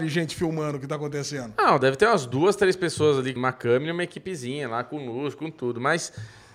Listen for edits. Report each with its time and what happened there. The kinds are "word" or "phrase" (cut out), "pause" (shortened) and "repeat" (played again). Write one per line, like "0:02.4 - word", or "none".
0:03.4 - word